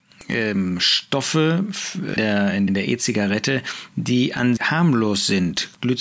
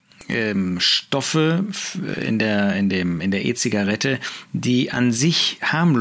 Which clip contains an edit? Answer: first; 3 cuts; at 2.2 s, 2.7 s, 4.6 s

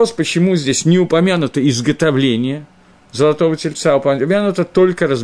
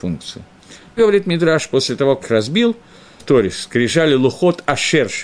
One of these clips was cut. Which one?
second; 3 cuts; at 1.0 s, 2.2 s, 3.2 s

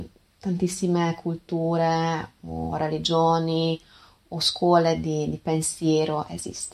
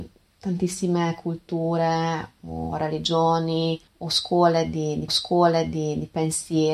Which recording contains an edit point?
second; 2 cuts; at 3.9 s, 5.1 s

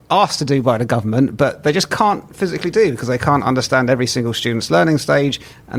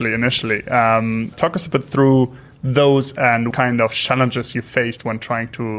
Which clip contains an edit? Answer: second; 2 cuts; at 1.3 s, 3.5 s

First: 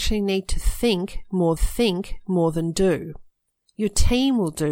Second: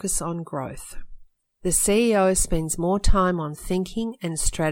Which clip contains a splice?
first; 1 cut; at 1.6 s

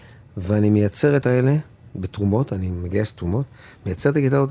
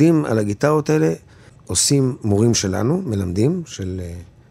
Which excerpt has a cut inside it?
first; 1 cut; at 1.2 s

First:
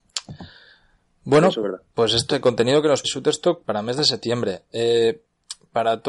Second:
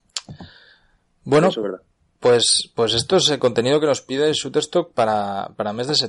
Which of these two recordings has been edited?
first; 4 cuts; at 1.9 s, 2.3 s, 3.0 s, 3.6 s

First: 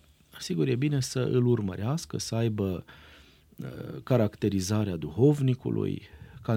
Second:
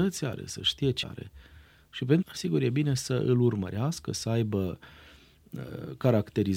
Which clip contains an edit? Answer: second; 2 cuts; at 1.0 s, 2.2 s

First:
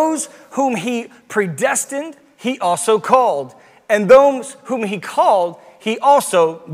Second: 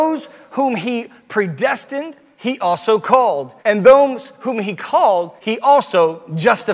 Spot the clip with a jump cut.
second; 2 cuts; at 3.6 s, 5.4 s

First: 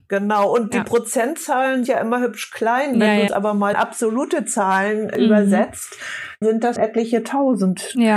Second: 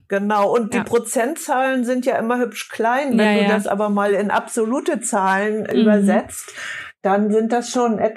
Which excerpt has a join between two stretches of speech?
first; 5 cuts; at 1.8 s, 3.3 s, 3.7 s, 6.4 s, 6.8 s

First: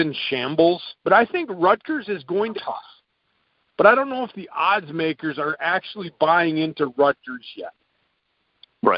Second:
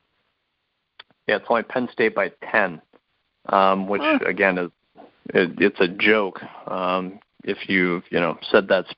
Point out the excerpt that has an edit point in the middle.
first; 2 cuts; at 1.0 s, 2.5 s

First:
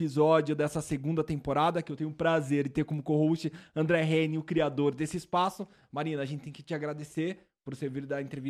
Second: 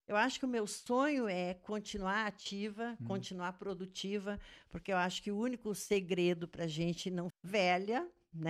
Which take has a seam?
second; 1 cut; at 7.3 s

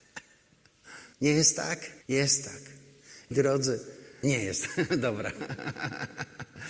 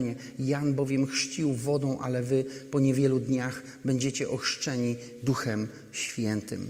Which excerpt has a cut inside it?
first; 4 cuts; at 1.1 s, 2.0 s, 3.3 s, 4.2 s

